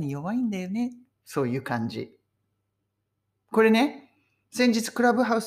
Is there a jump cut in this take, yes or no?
no